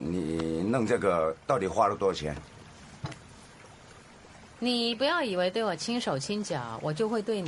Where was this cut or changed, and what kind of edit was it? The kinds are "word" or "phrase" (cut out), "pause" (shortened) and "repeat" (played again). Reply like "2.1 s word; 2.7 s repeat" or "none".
1.4 s pause